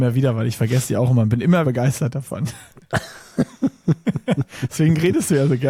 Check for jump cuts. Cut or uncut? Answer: cut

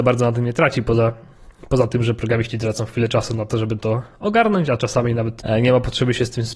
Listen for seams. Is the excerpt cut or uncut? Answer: uncut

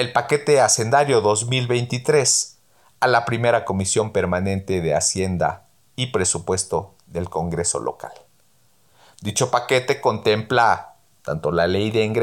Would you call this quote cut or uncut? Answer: uncut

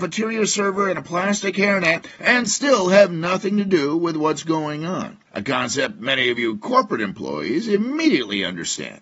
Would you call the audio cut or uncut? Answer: uncut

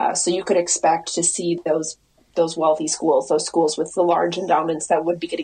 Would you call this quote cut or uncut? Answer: uncut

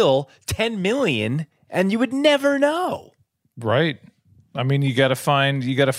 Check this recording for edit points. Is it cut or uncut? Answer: uncut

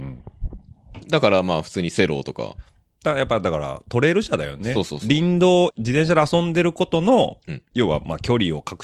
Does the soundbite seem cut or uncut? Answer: cut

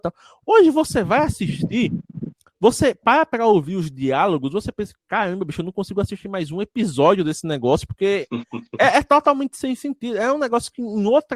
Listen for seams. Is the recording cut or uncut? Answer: uncut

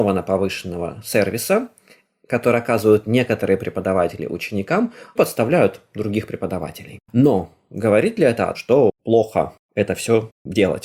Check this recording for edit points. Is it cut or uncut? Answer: cut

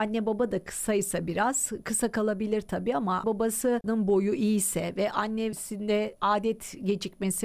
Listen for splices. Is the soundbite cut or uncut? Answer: cut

